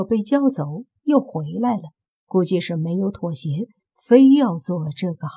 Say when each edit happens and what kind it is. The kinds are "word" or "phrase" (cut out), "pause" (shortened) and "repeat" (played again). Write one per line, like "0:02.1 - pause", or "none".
none